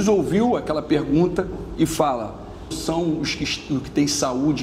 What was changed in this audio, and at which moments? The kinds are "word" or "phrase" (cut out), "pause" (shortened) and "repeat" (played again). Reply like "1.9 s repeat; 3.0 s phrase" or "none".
2.7 s word